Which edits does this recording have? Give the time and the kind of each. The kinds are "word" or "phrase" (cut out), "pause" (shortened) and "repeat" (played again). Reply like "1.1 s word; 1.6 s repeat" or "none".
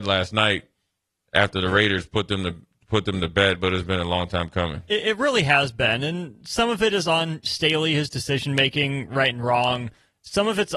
none

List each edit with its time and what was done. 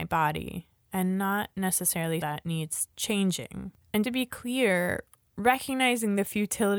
2.2 s word; 4.0 s word

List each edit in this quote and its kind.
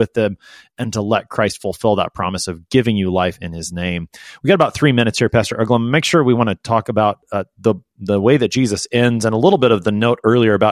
none

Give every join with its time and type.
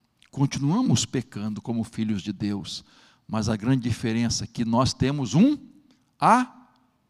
none

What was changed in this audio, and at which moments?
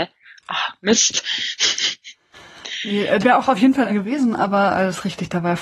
3.2 s word; 3.9 s word

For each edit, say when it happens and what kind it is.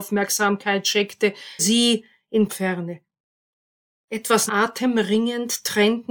1.6 s word; 2.5 s word; 4.5 s word

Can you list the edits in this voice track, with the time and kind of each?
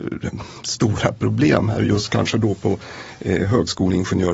none

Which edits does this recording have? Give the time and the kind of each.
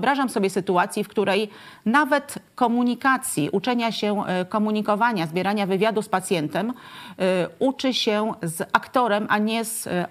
none

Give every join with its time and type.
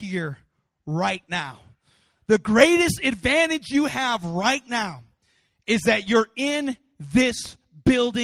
none

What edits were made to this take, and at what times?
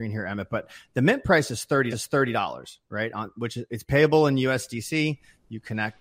1.9 s repeat

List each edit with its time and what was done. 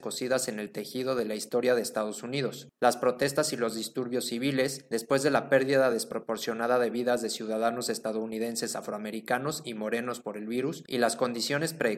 none

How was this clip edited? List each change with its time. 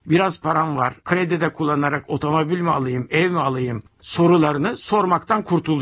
1.0 s pause

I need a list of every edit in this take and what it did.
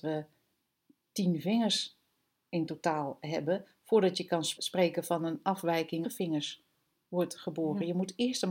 4.6 s word; 6.0 s phrase

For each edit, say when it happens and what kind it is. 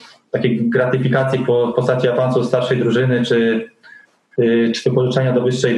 none

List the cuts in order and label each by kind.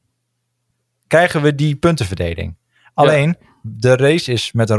none

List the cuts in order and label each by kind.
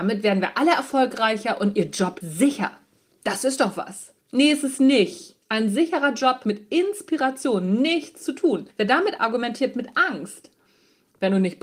2.2 s word; 4.2 s pause; 5.4 s pause; 6.4 s word; 8.7 s pause; 9.2 s word

